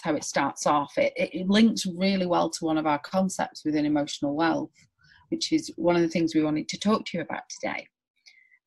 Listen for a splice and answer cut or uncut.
uncut